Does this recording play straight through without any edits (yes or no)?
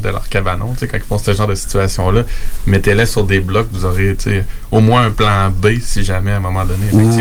yes